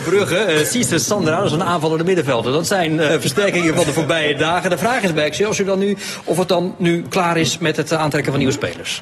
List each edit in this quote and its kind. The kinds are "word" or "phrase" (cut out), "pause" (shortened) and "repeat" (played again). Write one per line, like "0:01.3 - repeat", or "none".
0:03.1 - word